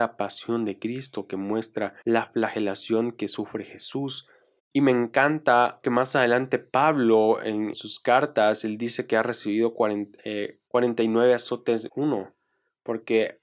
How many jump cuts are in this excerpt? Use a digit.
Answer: 6